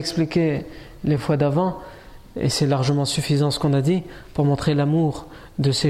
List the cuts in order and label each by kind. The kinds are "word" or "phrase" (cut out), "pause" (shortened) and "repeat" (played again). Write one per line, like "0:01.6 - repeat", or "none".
none